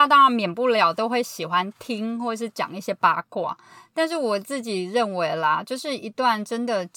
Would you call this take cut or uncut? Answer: uncut